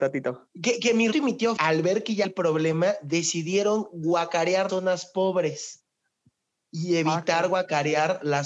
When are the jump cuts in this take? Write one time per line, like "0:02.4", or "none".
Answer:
0:01.1
0:01.6
0:02.2
0:04.7